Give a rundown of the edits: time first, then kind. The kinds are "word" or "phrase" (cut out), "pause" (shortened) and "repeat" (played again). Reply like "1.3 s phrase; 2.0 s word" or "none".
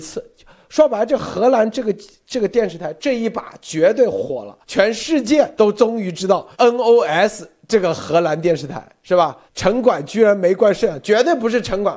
4.6 s pause; 5.5 s pause; 6.5 s pause; 9.5 s pause